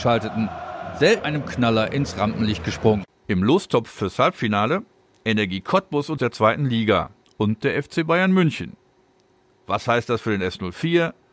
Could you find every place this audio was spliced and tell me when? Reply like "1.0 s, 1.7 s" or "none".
1.2 s, 6.2 s, 7.2 s

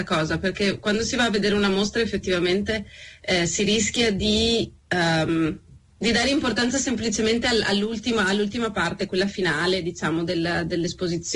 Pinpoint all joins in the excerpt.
4.8 s

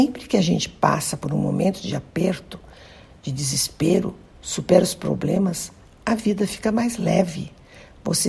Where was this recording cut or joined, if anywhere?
none

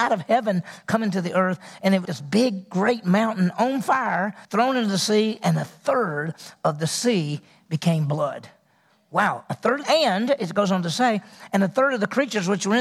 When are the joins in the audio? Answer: 2.0 s, 4.4 s, 9.8 s

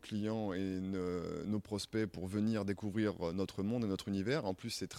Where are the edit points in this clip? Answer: none

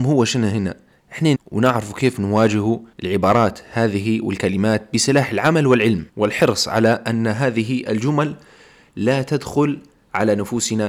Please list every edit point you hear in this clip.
1.3 s, 2.9 s, 6.1 s

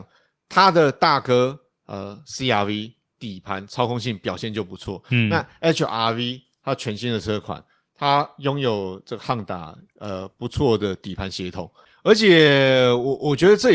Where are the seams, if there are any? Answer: none

